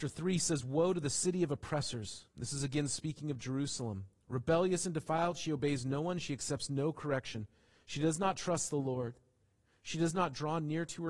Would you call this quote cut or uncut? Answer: uncut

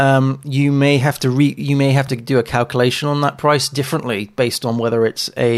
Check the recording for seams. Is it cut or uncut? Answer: uncut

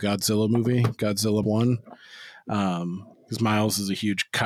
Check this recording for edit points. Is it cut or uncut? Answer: cut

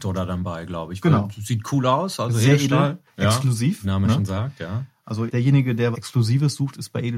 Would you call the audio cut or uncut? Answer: cut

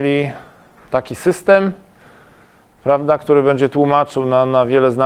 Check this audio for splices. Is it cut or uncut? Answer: uncut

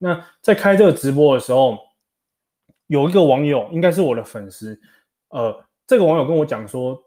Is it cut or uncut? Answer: uncut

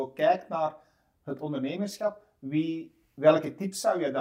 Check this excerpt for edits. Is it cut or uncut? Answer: uncut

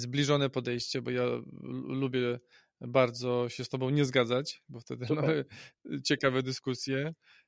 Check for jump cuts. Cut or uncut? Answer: uncut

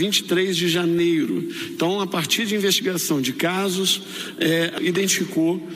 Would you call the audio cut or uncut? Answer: cut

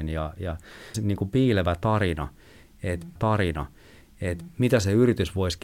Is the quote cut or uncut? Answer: cut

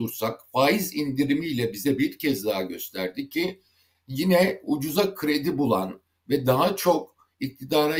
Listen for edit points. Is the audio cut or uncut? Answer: uncut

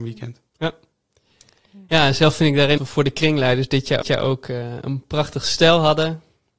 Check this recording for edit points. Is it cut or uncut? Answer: cut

